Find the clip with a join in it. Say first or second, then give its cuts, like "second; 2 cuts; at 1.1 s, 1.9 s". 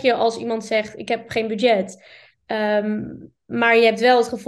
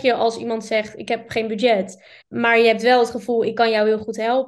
second; 1 cut; at 2.2 s